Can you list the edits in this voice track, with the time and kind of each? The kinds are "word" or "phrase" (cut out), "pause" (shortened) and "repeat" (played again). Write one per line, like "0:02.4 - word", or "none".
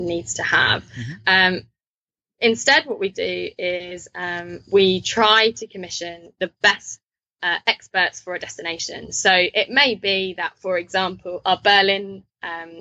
none